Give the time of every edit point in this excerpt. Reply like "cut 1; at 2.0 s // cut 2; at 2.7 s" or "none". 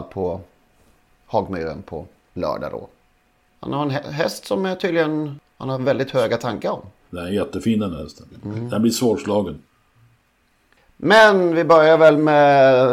none